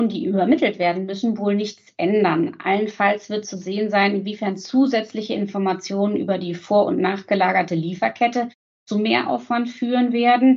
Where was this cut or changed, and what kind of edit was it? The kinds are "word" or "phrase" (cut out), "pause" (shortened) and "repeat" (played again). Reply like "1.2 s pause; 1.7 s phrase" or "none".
none

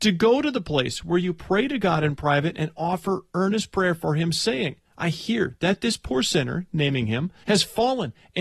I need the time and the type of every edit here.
4.8 s pause; 7.4 s pause

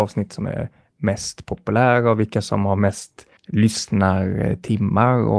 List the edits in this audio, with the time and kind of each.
3.4 s pause

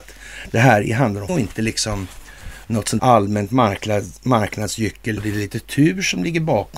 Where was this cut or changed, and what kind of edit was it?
1.3 s word; 3.0 s word; 5.2 s word

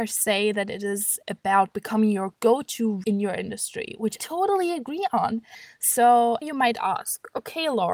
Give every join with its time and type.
1.2 s word; 3.0 s word; 4.2 s word; 6.4 s word

